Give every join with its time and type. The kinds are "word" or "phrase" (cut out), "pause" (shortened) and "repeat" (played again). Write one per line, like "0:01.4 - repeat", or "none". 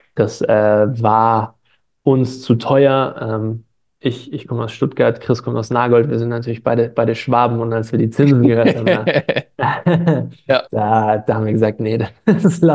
none